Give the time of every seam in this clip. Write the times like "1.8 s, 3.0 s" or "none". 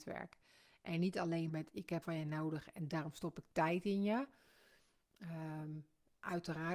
1.5 s, 2.0 s